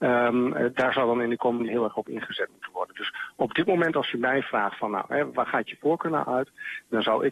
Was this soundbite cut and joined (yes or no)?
yes